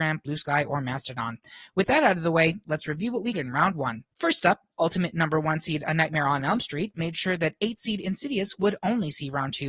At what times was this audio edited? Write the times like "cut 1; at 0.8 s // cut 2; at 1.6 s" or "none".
cut 1; at 3.3 s // cut 2; at 4.1 s

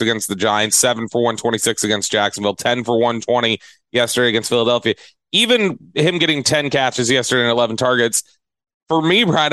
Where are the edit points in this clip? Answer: none

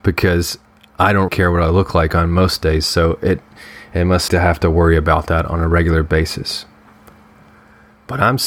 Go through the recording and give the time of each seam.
cut 1; at 1.3 s // cut 2; at 4.3 s

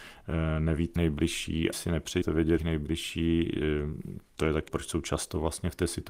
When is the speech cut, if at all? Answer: cut 1; at 1.0 s // cut 2; at 1.7 s // cut 3; at 2.2 s // cut 4; at 2.6 s // cut 5; at 4.7 s

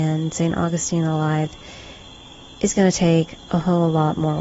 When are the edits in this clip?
none

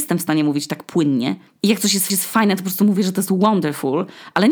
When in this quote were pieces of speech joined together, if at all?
cut 1; at 1.5 s // cut 2; at 2.1 s

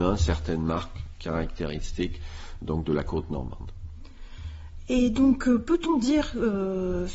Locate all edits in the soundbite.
cut 1; at 2.6 s

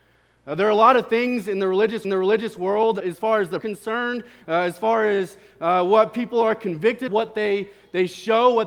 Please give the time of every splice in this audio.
cut 1; at 2.0 s // cut 2; at 3.0 s // cut 3; at 3.6 s // cut 4; at 7.1 s

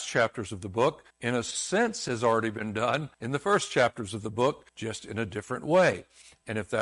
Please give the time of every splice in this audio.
cut 1; at 1.1 s // cut 2; at 3.1 s // cut 3; at 4.7 s

